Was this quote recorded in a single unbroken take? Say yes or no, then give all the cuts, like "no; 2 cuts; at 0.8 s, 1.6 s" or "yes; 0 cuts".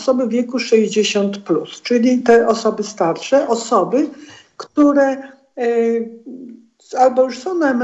yes; 0 cuts